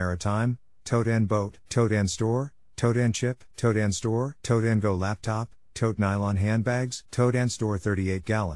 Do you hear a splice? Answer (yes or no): yes